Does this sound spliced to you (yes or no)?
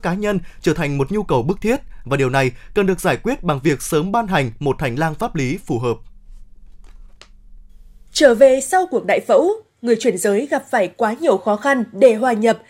no